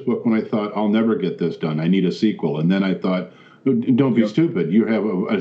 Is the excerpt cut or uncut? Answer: uncut